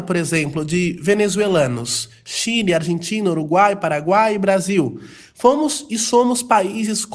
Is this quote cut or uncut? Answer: uncut